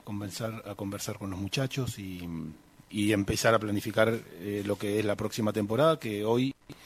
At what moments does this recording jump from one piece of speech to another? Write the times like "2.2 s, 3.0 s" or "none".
none